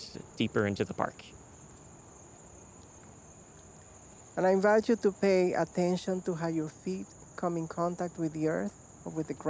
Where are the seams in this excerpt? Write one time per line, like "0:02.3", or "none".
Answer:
0:04.3